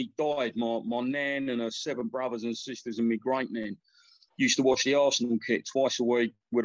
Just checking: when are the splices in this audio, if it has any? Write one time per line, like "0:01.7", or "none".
none